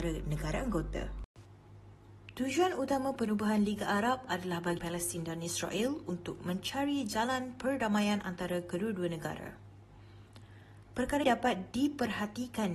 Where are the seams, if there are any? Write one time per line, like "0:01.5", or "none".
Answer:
0:04.8
0:11.2